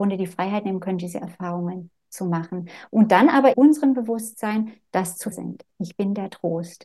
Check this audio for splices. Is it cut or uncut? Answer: cut